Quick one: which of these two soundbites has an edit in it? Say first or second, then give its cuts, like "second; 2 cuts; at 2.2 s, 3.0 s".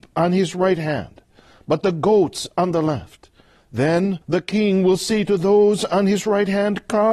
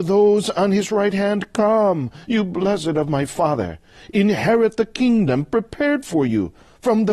first; 1 cut; at 4.2 s